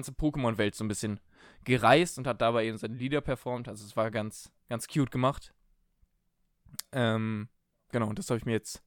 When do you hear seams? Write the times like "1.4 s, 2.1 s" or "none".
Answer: none